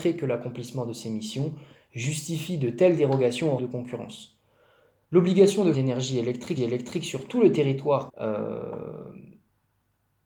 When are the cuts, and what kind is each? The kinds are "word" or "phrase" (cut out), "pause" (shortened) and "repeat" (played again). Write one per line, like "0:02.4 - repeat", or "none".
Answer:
0:03.6 - word
0:05.7 - word
0:06.6 - repeat
0:08.1 - word